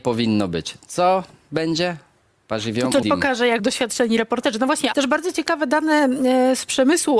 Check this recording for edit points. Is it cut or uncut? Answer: cut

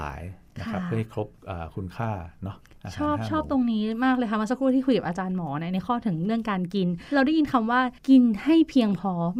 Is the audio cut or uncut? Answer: cut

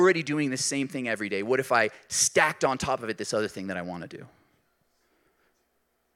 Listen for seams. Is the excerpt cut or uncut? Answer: uncut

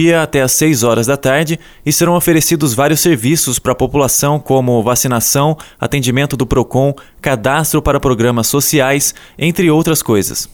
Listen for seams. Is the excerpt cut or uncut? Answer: uncut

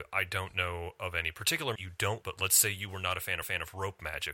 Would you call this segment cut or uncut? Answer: cut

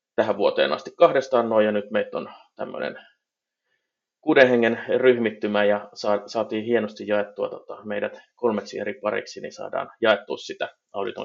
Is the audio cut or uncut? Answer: uncut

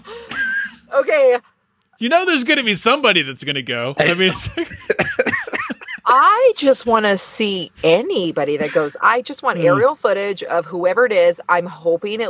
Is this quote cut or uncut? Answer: uncut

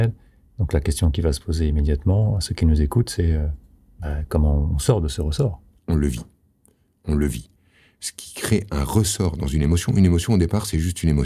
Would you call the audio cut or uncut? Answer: uncut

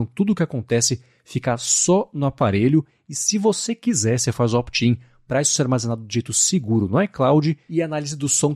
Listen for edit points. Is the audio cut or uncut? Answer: uncut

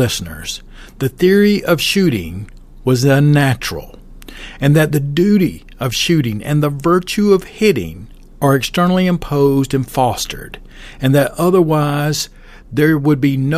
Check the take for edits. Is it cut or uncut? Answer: uncut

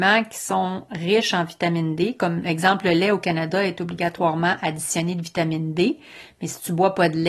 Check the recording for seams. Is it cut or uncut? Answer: uncut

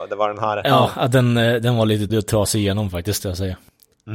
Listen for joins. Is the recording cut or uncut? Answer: cut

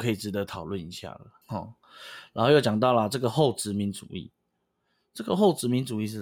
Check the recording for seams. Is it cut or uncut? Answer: cut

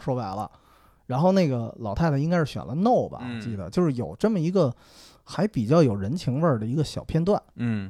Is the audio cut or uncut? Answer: uncut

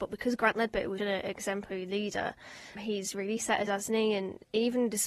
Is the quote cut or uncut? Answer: cut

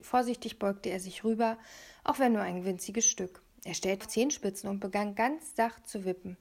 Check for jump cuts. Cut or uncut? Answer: cut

